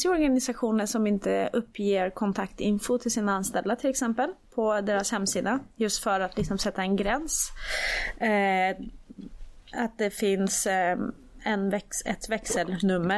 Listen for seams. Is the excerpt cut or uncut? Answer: cut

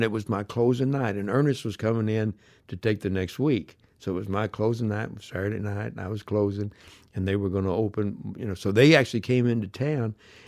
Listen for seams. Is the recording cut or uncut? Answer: uncut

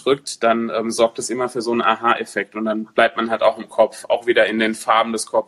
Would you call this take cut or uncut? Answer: uncut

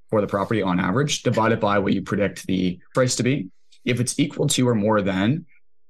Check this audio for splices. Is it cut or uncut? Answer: cut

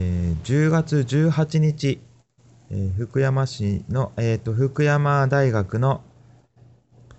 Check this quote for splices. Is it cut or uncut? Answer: uncut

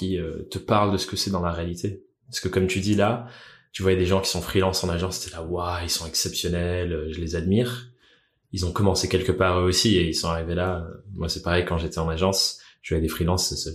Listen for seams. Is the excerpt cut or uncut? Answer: uncut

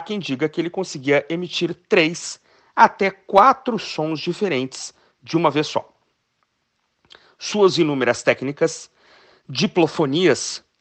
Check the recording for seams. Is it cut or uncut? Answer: uncut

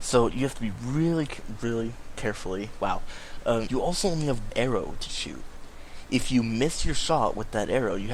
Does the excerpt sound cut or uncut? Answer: cut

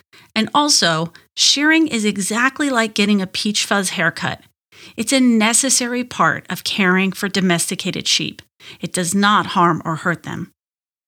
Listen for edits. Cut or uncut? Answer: uncut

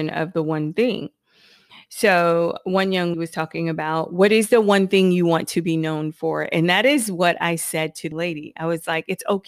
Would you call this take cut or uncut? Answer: cut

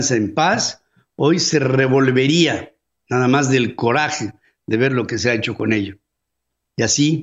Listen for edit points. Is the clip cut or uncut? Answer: uncut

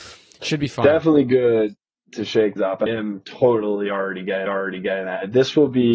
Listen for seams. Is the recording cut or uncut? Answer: cut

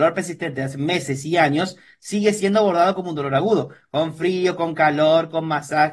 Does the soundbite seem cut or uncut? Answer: uncut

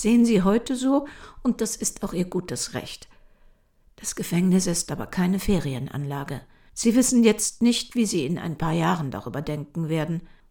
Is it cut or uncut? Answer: uncut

